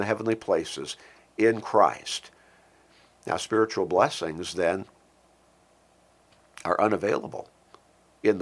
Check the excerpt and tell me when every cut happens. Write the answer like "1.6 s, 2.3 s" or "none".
none

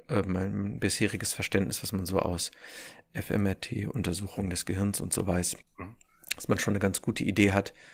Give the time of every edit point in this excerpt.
5.6 s

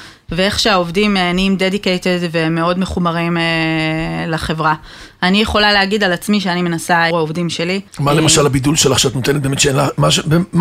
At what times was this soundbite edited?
7.1 s, 7.9 s

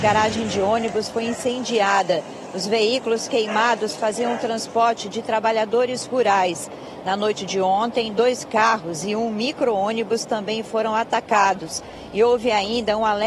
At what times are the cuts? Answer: none

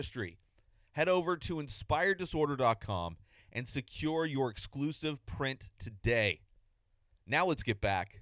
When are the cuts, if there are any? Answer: none

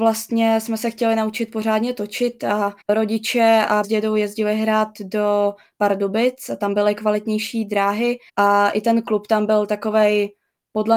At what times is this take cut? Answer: 2.8 s, 3.8 s, 8.3 s

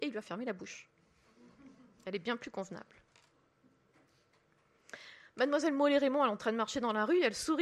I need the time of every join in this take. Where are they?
none

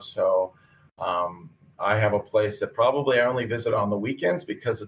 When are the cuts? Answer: none

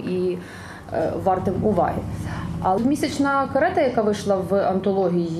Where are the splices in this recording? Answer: 2.8 s

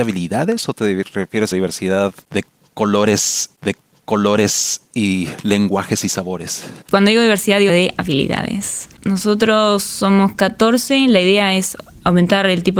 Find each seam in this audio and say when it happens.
1.5 s, 3.6 s, 6.8 s, 7.7 s

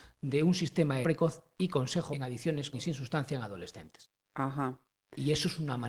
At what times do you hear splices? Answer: 1.0 s, 2.1 s, 2.7 s

